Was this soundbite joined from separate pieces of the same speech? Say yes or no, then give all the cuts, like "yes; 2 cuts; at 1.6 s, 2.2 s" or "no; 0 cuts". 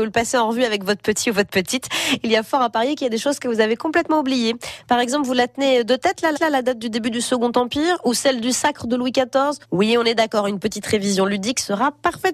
yes; 2 cuts; at 6.3 s, 9.6 s